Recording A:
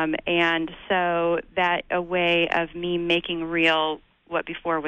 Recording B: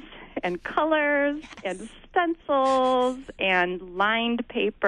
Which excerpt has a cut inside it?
A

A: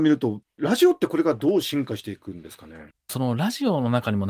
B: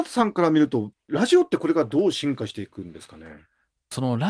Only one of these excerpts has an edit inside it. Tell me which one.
A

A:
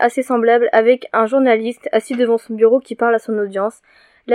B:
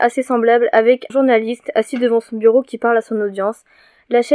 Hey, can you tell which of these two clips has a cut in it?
B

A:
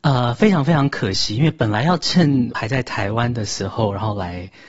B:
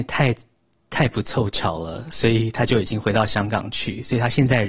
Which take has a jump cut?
A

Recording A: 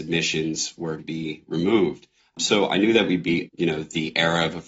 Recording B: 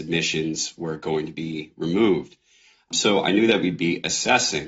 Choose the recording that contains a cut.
A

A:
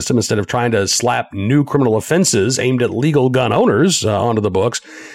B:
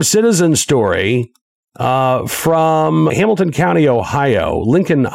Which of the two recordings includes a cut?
B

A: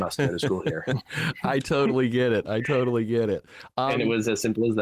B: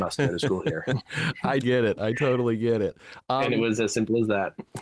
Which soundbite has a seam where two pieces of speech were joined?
B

